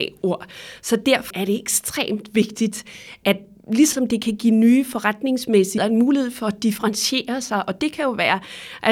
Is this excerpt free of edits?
no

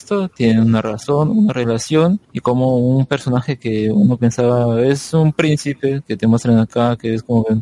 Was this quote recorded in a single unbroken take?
no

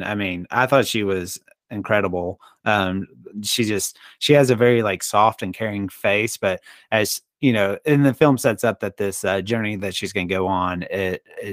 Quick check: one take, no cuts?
yes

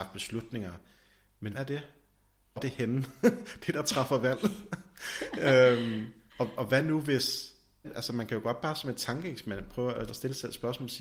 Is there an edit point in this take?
yes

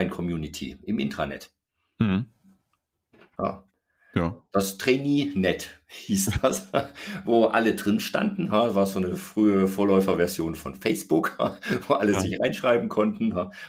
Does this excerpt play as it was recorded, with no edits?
yes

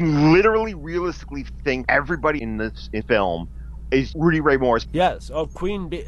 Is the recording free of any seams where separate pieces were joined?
no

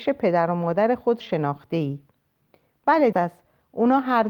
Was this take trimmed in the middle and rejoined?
yes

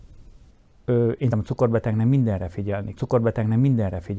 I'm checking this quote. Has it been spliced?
yes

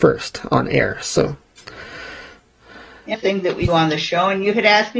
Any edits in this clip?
yes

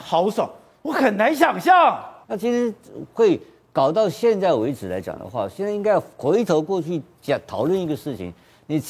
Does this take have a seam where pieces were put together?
no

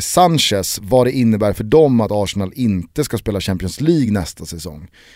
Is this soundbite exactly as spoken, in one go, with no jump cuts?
yes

